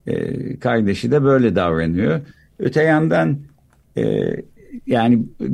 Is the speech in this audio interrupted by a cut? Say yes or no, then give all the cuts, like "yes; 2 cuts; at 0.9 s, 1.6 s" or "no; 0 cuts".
no; 0 cuts